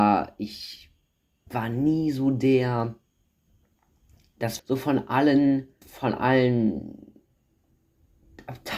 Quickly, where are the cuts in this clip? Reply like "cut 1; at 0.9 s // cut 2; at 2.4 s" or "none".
cut 1; at 1.5 s // cut 2; at 4.6 s // cut 3; at 5.8 s